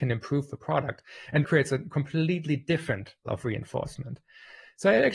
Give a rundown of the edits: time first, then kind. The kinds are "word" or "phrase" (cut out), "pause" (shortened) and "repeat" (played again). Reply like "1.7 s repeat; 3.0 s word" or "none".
1.4 s word; 3.3 s word